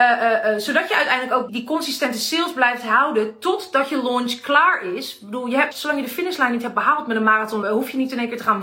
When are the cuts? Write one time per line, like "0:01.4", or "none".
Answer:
0:01.5
0:05.7
0:07.6